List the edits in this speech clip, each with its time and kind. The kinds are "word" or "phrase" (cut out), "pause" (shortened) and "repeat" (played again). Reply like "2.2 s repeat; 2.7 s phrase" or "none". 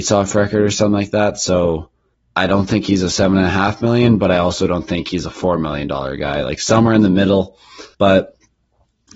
7.9 s pause